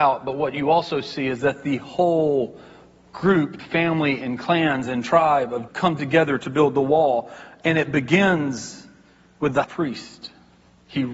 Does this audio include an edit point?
yes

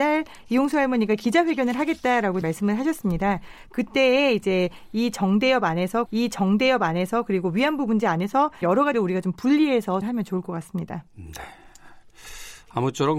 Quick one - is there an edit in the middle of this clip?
yes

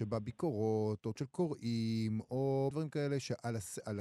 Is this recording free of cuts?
no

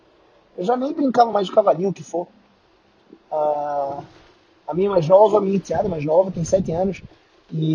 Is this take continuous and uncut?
yes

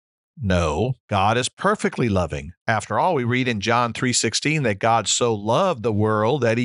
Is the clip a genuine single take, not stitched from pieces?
no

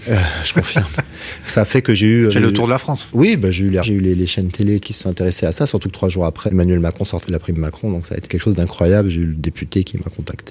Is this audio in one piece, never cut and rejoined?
no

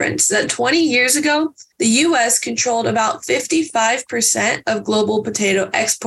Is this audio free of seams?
no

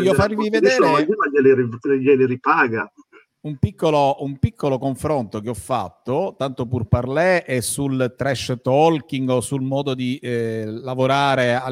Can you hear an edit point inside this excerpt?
no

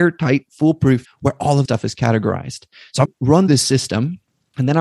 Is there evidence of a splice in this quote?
yes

